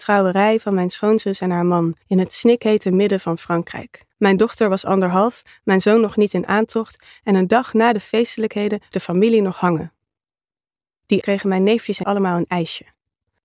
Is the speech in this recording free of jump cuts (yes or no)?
no